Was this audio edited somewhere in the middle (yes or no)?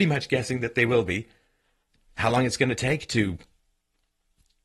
no